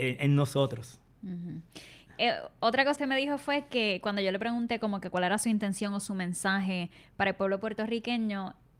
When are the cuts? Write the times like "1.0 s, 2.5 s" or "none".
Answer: 3.0 s